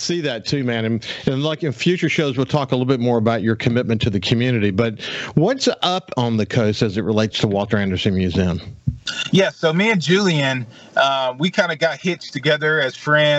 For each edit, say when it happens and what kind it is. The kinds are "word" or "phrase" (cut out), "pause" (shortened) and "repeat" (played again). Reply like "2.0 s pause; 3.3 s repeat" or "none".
none